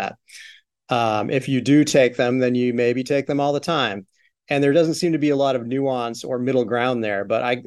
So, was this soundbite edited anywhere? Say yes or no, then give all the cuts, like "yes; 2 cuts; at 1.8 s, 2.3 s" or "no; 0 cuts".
no; 0 cuts